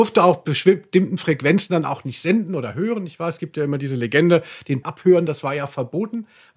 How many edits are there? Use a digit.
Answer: 1